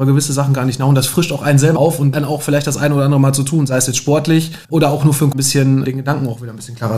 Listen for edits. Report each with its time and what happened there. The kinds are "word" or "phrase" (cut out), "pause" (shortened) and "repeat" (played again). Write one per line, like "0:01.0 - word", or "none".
0:01.8 - word
0:02.1 - word
0:04.6 - pause
0:05.3 - word